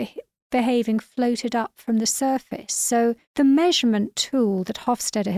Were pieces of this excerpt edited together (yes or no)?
yes